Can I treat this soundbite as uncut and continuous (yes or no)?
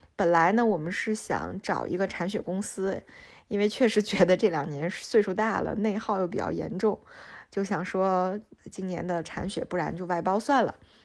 no